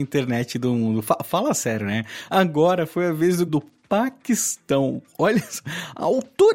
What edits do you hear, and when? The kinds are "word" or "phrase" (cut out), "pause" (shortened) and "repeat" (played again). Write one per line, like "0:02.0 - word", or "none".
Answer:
0:03.5 - word